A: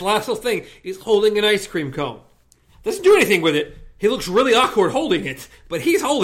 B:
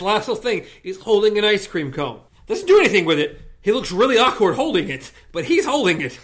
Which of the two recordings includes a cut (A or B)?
B